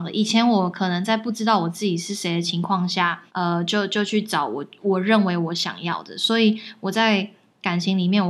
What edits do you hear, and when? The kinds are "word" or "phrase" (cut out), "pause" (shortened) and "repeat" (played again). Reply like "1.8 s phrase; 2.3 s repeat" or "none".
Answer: 3.3 s pause